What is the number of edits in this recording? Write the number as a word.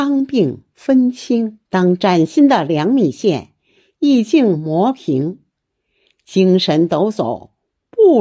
one